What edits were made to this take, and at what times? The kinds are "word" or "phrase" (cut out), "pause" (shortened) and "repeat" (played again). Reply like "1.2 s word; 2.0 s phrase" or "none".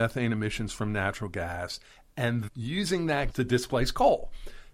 2.5 s word; 3.3 s word